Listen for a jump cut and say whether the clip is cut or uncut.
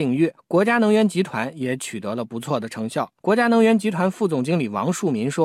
cut